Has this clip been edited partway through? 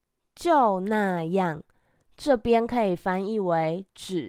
no; 0 cuts

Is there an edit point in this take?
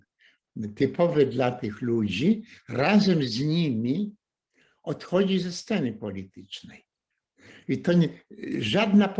no; 0 cuts

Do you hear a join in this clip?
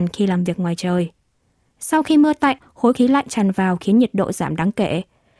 yes; 1 cut; at 2.9 s

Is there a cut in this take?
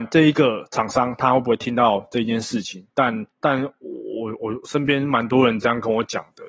yes; 1 cut; at 3.3 s

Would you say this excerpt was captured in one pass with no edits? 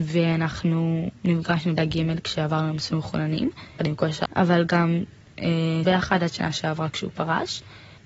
no; 4 cuts; at 1.8 s, 3.8 s, 4.2 s, 5.8 s

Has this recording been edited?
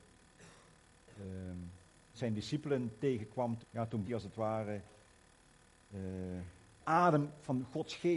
yes; 4 cuts; at 2.1 s, 3.6 s, 4.0 s, 6.8 s

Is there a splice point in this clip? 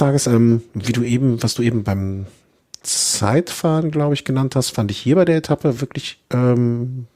no; 0 cuts

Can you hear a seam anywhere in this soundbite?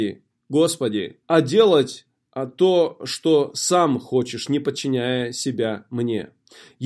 yes; 1 cut; at 1.2 s

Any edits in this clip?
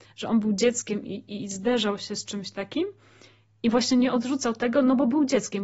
no; 0 cuts

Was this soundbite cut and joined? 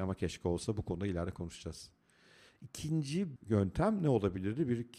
yes; 1 cut; at 3.4 s

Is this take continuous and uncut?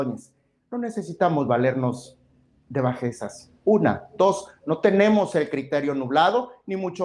yes; 0 cuts

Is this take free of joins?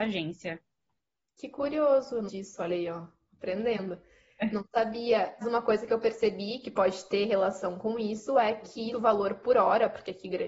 no; 3 cuts; at 2.3 s, 5.4 s, 8.9 s

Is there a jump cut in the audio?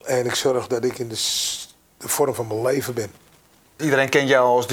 no; 0 cuts

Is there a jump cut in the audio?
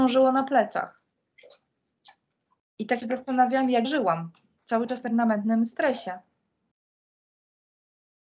yes; 3 cuts; at 3.0 s, 3.8 s, 5.0 s

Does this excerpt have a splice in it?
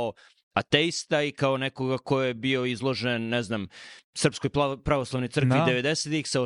no; 0 cuts

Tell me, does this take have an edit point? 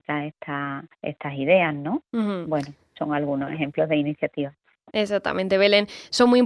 yes; 2 cuts; at 0.9 s, 2.1 s

